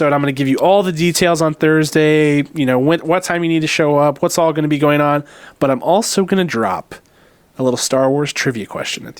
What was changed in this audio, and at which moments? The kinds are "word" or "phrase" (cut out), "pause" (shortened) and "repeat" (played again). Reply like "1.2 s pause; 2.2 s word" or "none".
none